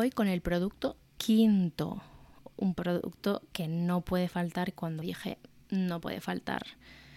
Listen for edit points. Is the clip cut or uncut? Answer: cut